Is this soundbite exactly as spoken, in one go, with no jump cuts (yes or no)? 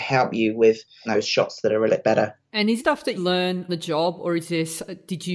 no